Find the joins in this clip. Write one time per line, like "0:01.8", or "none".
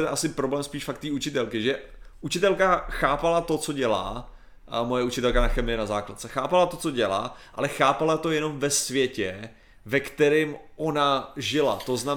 none